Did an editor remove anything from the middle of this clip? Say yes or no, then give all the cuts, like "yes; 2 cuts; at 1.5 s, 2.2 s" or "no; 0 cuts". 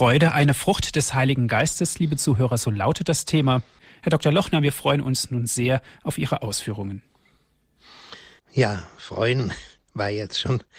yes; 1 cut; at 8.4 s